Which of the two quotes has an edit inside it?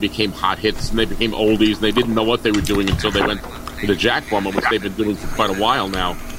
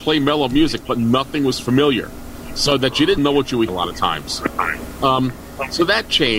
second; 2 cuts; at 3.2 s, 3.7 s

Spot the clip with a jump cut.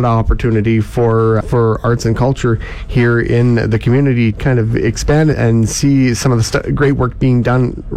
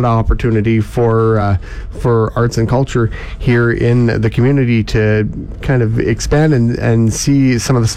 first; 3 cuts; at 1.4 s, 4.3 s, 5.3 s

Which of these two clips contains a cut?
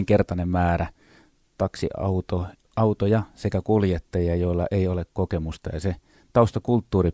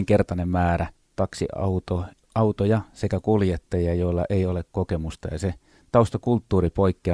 second; 1 cut; at 0.9 s

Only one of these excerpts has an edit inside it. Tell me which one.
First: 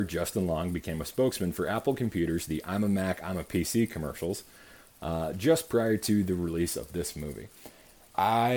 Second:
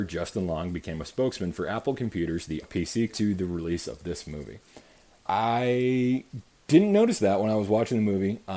second; 2 cuts; at 2.6 s, 3.1 s

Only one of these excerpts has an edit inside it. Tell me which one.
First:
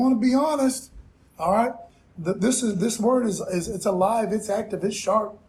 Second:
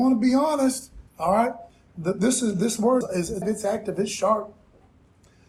second; 3 cuts; at 1.1 s, 3.0 s, 3.4 s

